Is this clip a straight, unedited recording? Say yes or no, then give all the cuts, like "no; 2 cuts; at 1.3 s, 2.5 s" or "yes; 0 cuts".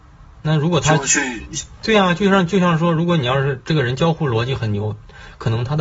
yes; 0 cuts